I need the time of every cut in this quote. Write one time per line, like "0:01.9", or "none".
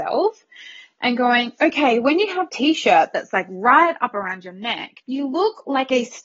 0:02.5
0:05.0